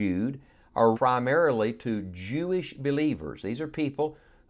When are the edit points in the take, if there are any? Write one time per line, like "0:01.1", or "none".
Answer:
0:00.9